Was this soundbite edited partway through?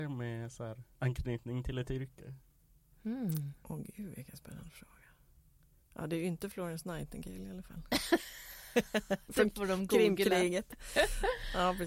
no; 0 cuts

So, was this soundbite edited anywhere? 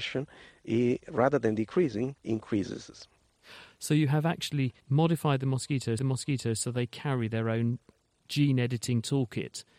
yes; 3 cuts; at 2.2 s, 4.8 s, 6.0 s

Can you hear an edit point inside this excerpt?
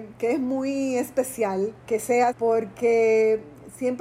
yes; 2 cuts; at 1.8 s, 2.3 s

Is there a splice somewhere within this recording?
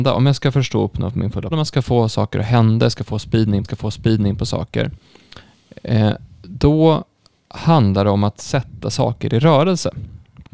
yes; 2 cuts; at 1.5 s, 3.6 s

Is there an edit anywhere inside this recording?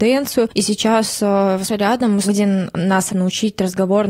yes; 3 cuts; at 1.7 s, 2.2 s, 3.1 s

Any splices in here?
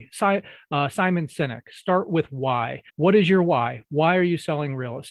yes; 1 cut; at 2.9 s

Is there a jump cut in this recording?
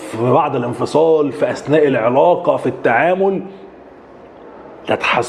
no; 0 cuts

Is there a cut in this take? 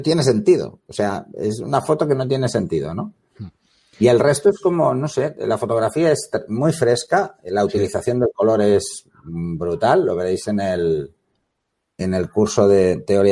no; 0 cuts

